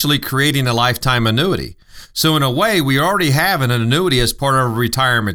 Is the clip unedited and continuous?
yes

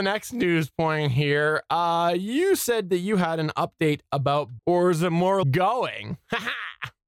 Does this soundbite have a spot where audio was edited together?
yes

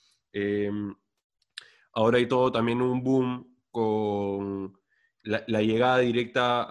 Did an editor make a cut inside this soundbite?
no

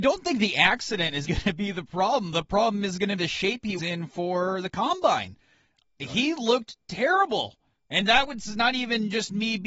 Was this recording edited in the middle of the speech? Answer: yes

